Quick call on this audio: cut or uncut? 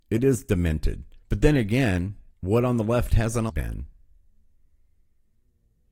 cut